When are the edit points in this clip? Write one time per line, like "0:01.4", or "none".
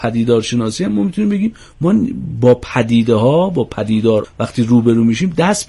0:04.2